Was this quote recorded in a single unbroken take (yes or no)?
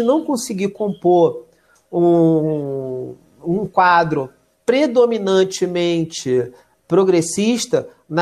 yes